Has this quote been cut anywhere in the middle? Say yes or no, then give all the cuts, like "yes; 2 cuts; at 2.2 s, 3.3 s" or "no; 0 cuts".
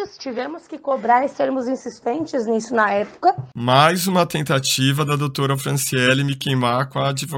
no; 0 cuts